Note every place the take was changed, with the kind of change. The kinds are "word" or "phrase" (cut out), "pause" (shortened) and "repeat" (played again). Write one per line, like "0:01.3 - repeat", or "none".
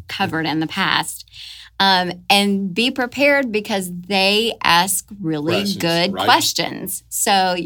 none